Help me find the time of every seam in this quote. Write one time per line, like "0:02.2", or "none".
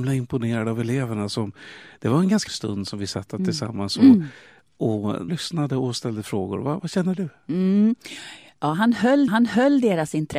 0:02.5
0:05.3
0:06.8
0:09.3